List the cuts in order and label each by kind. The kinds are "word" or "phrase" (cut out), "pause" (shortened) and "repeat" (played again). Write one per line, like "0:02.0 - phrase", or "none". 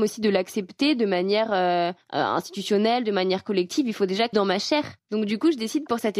0:02.0 - pause
0:04.3 - phrase
0:05.0 - pause